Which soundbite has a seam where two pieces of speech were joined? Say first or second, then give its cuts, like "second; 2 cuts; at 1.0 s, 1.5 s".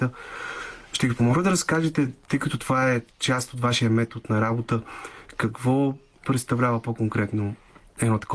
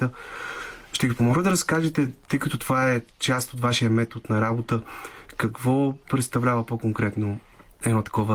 second; 1 cut; at 6.0 s